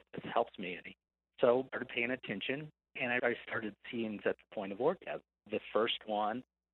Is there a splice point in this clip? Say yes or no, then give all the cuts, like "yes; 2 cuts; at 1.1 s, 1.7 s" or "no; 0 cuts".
yes; 3 cuts; at 1.7 s, 3.2 s, 4.2 s